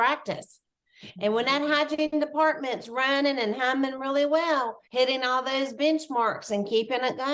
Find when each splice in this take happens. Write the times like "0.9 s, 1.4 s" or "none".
4.8 s